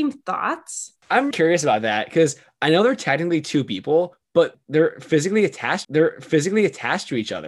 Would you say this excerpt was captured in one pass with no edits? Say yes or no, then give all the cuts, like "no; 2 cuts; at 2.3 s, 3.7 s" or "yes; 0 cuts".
no; 2 cuts; at 1.3 s, 5.8 s